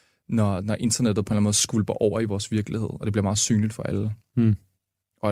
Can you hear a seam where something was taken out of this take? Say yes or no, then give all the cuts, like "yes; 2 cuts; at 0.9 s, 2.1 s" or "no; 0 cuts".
no; 0 cuts